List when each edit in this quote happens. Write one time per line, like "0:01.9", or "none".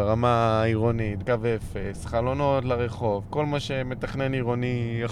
0:01.2